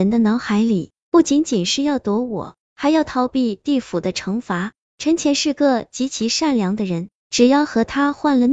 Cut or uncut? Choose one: uncut